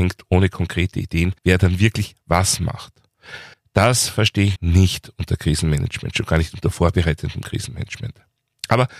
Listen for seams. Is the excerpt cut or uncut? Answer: cut